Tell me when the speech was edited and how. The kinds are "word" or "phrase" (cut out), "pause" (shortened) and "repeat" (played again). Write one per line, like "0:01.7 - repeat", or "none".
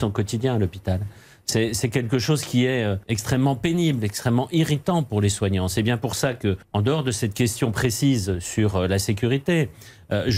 none